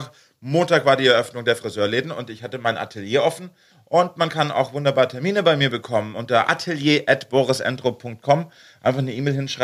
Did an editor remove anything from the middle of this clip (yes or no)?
no